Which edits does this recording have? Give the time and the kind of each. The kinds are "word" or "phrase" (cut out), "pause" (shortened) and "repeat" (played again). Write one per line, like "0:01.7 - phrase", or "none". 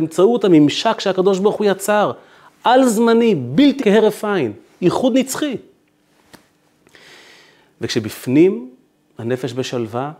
0:03.8 - phrase